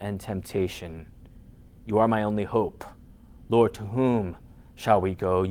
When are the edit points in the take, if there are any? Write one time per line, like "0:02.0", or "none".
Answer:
none